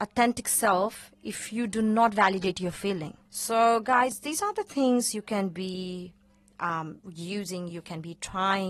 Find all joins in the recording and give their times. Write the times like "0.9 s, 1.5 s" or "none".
3.3 s